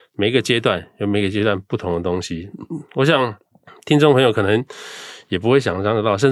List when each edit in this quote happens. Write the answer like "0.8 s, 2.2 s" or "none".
3.5 s